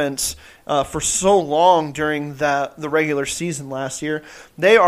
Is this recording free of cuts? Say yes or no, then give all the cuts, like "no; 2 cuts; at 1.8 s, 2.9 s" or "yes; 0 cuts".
yes; 0 cuts